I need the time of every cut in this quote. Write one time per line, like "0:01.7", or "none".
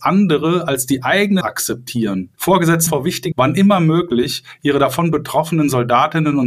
0:01.4
0:02.9
0:03.3